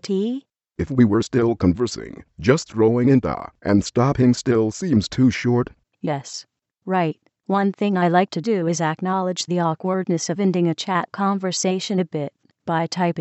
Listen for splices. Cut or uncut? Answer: uncut